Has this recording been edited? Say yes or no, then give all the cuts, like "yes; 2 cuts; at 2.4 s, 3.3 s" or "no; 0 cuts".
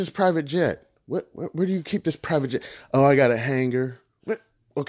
no; 0 cuts